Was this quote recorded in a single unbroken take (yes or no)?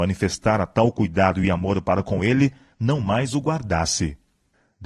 yes